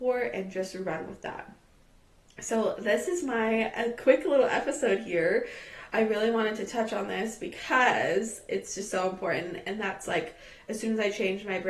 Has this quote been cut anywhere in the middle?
no; 0 cuts

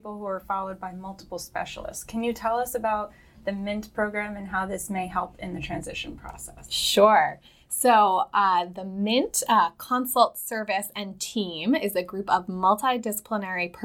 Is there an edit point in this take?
no; 0 cuts

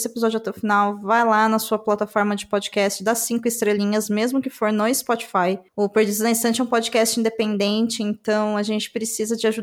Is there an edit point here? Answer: no; 0 cuts

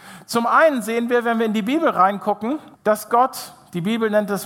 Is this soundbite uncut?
no; 1 cut; at 2.7 s

